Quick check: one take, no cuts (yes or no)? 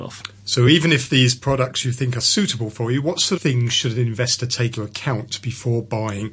no